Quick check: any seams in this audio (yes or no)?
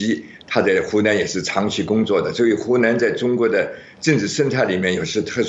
no